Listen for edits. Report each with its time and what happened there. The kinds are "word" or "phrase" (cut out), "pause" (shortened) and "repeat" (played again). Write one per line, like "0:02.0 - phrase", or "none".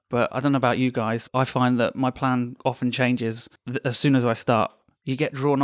0:01.3 - word